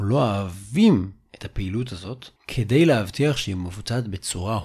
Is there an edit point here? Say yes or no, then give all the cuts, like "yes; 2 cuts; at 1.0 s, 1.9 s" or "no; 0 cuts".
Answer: yes; 1 cut; at 2.4 s